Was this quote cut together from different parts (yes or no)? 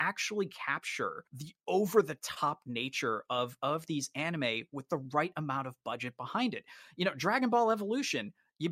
yes